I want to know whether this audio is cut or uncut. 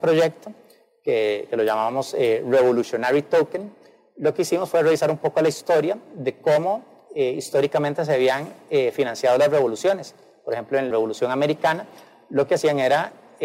cut